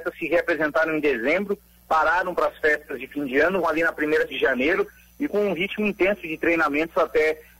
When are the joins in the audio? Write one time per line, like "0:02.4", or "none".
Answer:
0:03.6
0:04.3
0:05.3